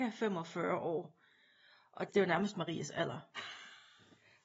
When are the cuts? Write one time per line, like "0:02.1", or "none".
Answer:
0:02.1